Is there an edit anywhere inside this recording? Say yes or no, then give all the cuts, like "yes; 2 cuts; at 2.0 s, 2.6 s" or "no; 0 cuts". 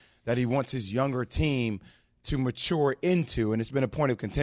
no; 0 cuts